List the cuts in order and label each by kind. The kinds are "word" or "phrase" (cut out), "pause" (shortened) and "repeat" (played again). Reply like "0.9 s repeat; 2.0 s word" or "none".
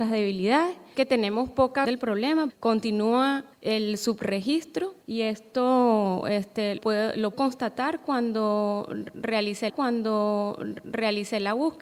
0.9 s word; 1.8 s word; 2.5 s word; 3.5 s pause; 5.0 s pause; 6.8 s word; 7.3 s phrase; 9.7 s repeat